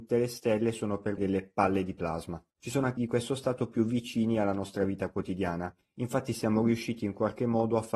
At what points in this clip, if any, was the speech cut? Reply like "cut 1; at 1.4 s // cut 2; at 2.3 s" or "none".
cut 1; at 1.2 s // cut 2; at 2.5 s // cut 3; at 3.0 s